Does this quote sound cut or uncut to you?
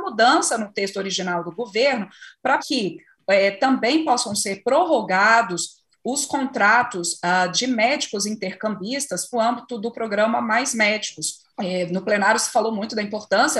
cut